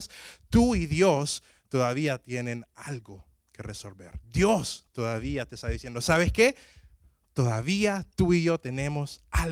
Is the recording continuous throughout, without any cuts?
yes; 0 cuts

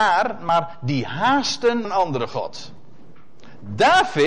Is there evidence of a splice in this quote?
yes; 1 cut; at 1.8 s

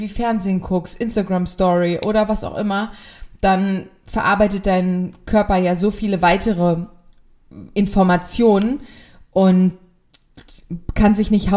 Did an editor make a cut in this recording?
no; 0 cuts

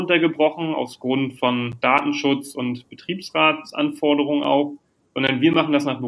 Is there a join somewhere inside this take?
no; 0 cuts

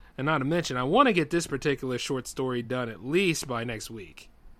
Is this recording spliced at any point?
no; 0 cuts

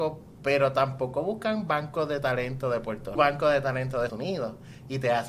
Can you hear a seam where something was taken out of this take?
yes; 2 cuts; at 3.2 s, 4.1 s

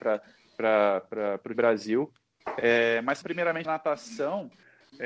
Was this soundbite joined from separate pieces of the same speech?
yes; 3 cuts; at 1.5 s, 3.2 s, 3.6 s

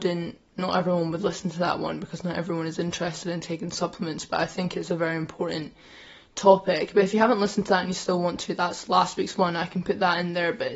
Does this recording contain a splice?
no; 0 cuts

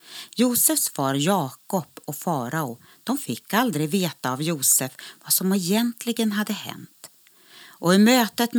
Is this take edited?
no; 0 cuts

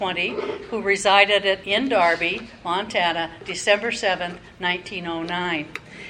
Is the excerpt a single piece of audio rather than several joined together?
no; 1 cut; at 1.6 s

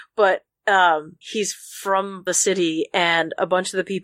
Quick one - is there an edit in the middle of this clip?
yes; 2 cuts; at 1.2 s, 2.3 s

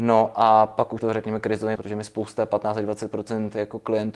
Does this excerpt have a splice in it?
yes; 2 cuts; at 1.0 s, 1.8 s

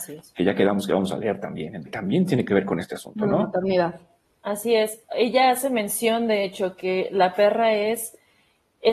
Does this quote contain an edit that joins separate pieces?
yes; 1 cut; at 1.9 s

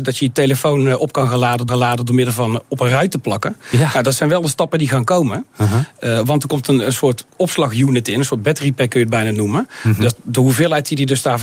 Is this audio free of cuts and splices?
no; 1 cut; at 1.7 s

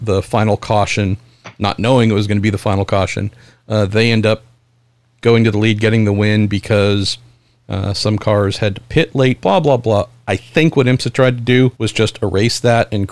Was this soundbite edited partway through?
yes; 1 cut; at 11.8 s

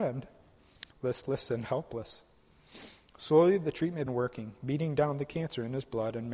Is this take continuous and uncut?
no; 2 cuts; at 0.9 s, 4.1 s

